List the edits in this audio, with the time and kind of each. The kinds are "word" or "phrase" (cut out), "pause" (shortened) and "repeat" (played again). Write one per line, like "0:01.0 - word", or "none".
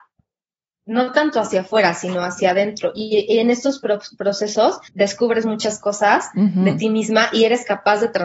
0:04.9 - pause